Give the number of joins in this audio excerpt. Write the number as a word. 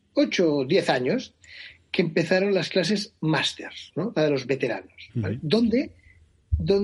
zero